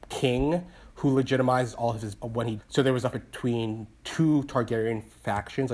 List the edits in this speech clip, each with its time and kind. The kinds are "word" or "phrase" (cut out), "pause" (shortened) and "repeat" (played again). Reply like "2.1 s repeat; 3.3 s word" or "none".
2.2 s word; 2.6 s word; 3.1 s word